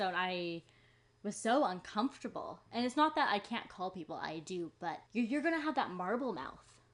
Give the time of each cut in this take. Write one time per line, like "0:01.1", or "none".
0:05.1

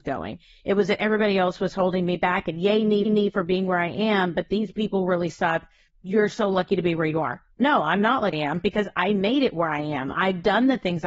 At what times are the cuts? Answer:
0:03.1
0:05.9
0:08.3

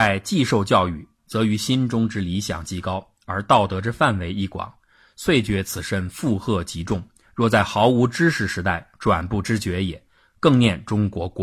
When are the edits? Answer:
none

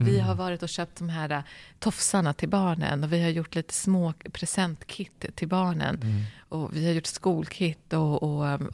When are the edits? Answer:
none

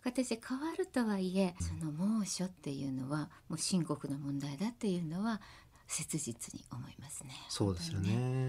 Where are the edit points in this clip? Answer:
0:01.6

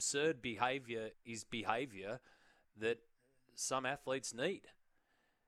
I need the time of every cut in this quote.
0:01.1

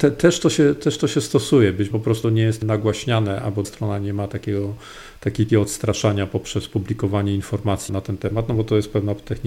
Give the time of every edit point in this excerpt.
0:01.9
0:02.2
0:02.6
0:03.6
0:05.5
0:07.9

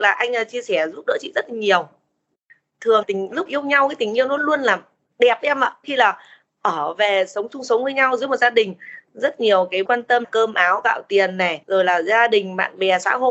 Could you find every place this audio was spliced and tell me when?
0:03.0
0:03.5
0:04.4
0:05.8
0:09.9
0:10.2

